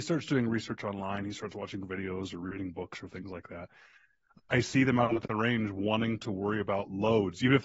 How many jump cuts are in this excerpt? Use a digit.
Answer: 0